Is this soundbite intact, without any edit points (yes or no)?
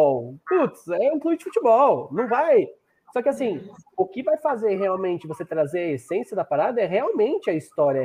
yes